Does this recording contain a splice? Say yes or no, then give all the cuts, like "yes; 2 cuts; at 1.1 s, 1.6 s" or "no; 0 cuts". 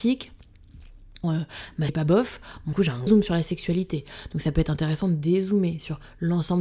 yes; 4 cuts; at 1.2 s, 1.9 s, 2.7 s, 3.1 s